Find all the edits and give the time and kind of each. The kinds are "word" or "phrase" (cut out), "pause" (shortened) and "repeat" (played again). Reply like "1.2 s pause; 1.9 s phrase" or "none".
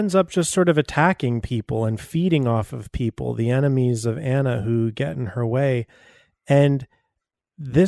none